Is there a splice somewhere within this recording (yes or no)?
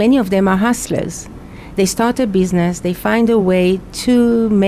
no